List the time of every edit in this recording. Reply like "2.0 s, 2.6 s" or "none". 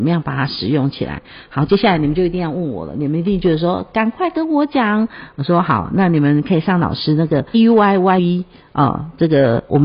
7.5 s, 8.2 s